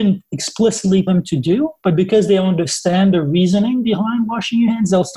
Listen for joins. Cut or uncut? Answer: cut